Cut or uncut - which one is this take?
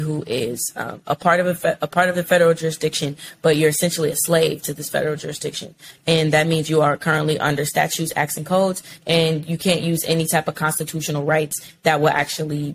uncut